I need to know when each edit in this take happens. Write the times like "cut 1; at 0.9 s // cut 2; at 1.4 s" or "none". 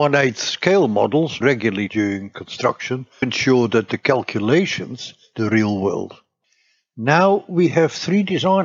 cut 1; at 1.4 s // cut 2; at 1.9 s // cut 3; at 3.2 s // cut 4; at 5.3 s